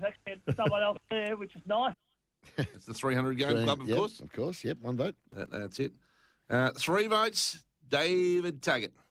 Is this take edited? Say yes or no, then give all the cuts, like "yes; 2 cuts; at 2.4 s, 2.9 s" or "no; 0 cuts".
no; 0 cuts